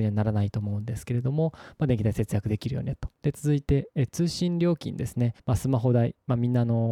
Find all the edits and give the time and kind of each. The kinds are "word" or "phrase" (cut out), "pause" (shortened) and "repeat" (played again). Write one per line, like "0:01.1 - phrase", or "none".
0:03.1 - pause
0:05.4 - pause